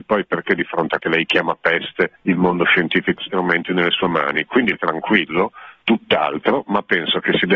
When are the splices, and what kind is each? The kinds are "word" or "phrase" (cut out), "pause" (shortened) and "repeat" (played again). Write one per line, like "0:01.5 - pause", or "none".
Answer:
0:01.0 - word
0:02.2 - pause
0:03.2 - phrase
0:04.7 - word
0:05.8 - pause